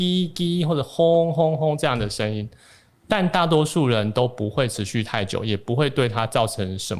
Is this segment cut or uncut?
uncut